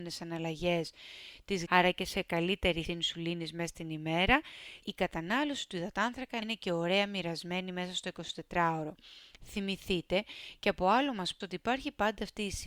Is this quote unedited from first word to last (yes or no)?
no